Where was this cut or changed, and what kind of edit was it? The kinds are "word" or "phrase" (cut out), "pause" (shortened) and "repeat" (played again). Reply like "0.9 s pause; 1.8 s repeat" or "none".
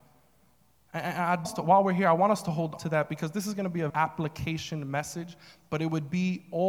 1.4 s word; 2.8 s word; 3.9 s word